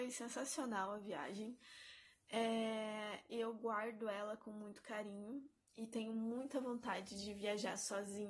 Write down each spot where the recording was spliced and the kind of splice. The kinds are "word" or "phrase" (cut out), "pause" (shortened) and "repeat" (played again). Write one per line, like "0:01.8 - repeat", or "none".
none

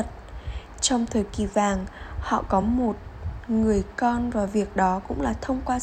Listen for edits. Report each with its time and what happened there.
none

